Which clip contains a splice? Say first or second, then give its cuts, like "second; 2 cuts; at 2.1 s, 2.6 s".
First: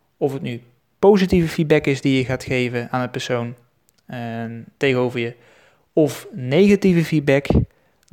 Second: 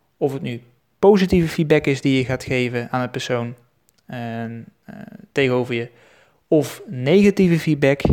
first; 1 cut; at 4.7 s